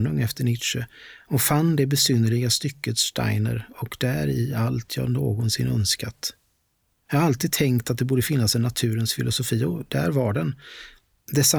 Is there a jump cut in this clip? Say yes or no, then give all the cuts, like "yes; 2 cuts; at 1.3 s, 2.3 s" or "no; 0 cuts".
no; 0 cuts